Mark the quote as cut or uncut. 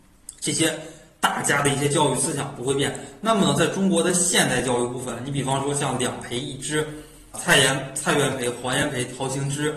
cut